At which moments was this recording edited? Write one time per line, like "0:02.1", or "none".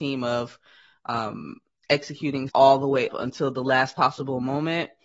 0:02.5
0:03.1